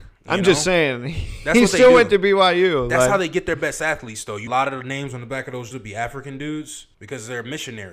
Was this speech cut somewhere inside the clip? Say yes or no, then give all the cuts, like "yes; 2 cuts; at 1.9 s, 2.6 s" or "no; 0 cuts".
yes; 3 cuts; at 4.5 s, 5.7 s, 6.9 s